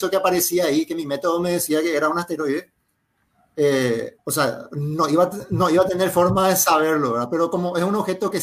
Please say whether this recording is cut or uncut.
cut